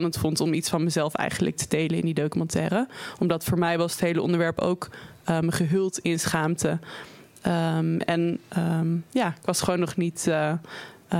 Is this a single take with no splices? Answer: yes; 0 cuts

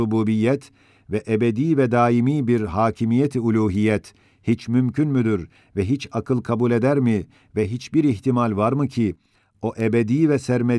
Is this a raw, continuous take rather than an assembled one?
yes; 0 cuts

